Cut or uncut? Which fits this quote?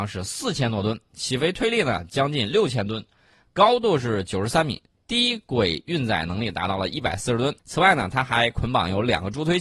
cut